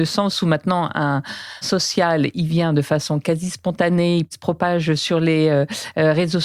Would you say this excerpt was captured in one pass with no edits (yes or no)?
no